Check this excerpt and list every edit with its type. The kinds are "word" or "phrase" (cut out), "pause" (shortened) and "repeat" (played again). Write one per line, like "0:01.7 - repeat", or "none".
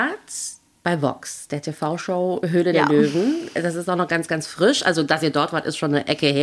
none